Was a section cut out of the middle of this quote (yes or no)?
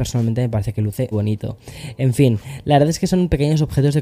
yes